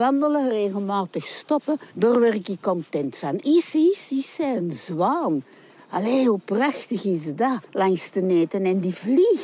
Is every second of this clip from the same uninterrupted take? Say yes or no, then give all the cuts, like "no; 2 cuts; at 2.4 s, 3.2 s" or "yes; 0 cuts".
no; 2 cuts; at 1.9 s, 7.6 s